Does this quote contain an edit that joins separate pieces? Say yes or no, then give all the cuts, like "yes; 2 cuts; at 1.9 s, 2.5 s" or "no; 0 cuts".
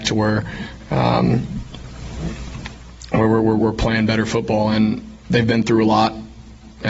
no; 0 cuts